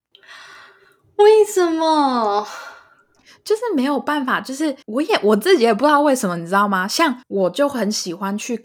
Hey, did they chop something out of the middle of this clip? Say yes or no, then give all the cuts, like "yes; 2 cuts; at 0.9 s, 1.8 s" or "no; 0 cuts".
yes; 2 cuts; at 4.8 s, 7.2 s